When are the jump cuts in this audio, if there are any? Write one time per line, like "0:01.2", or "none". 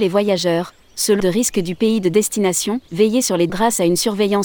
0:01.2
0:02.9
0:03.5